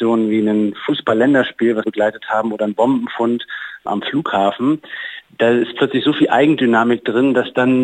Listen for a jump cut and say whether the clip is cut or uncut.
cut